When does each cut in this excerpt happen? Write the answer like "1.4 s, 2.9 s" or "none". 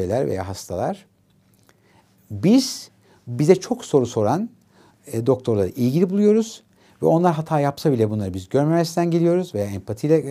none